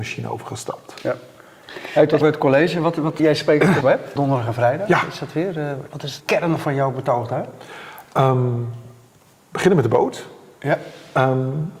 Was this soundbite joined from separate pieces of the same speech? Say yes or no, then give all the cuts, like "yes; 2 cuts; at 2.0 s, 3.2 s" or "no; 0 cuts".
yes; 6 cuts; at 2.2 s, 3.2 s, 3.8 s, 4.2 s, 5.9 s, 6.2 s